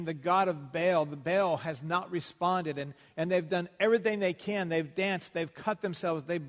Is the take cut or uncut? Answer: uncut